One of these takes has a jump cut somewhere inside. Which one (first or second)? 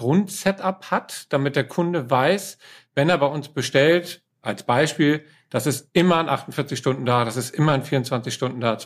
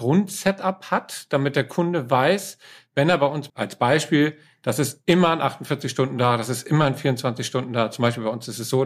second